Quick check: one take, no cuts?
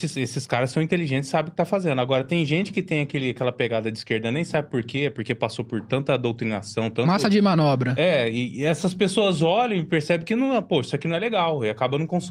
yes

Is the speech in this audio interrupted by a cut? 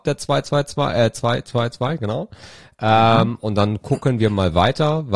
no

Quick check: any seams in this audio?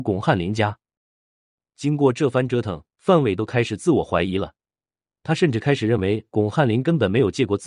no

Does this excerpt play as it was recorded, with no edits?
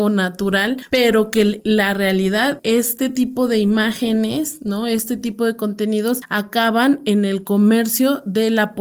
yes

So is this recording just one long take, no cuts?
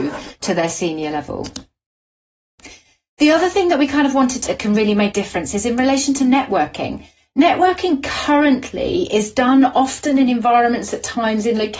no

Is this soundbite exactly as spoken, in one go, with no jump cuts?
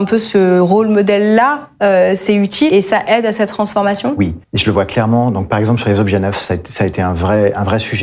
no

